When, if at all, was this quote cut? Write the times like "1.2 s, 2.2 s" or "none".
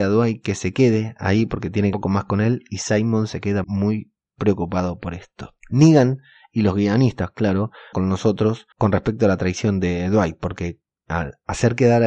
1.9 s, 3.6 s, 5.6 s, 7.9 s, 8.7 s